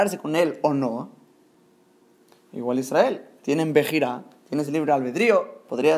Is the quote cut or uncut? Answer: uncut